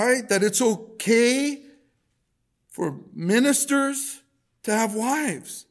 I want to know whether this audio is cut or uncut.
uncut